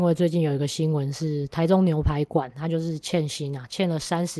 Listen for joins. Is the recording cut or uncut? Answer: uncut